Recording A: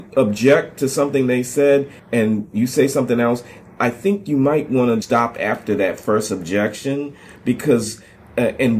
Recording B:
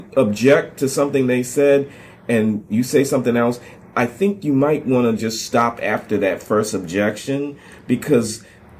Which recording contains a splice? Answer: A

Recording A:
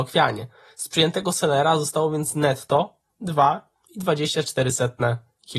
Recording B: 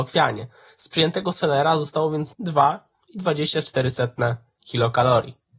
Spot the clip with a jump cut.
B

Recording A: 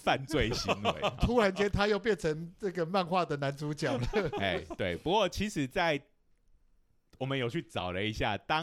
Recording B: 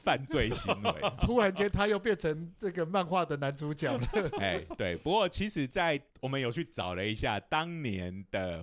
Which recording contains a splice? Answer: B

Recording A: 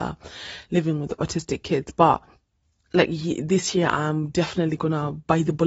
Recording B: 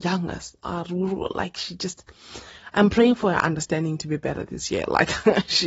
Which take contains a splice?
A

